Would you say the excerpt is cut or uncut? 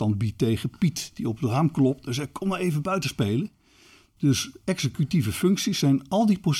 uncut